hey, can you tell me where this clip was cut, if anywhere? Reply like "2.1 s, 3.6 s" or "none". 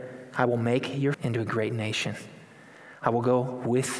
1.1 s